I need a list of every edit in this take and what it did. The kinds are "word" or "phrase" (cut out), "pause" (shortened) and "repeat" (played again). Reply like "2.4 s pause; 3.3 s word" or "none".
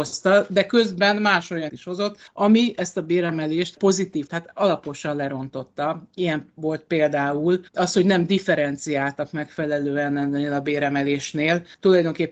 1.7 s word; 4.3 s word; 7.7 s pause